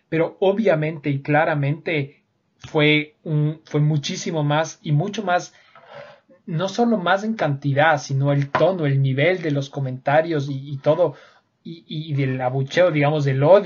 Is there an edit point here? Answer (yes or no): no